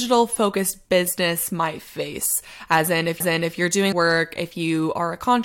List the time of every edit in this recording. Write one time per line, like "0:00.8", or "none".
0:03.2
0:03.9